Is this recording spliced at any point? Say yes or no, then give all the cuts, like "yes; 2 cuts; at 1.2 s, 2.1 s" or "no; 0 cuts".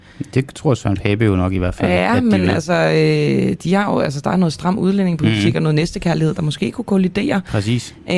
no; 0 cuts